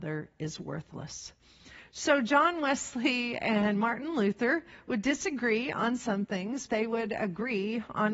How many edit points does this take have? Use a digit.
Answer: 1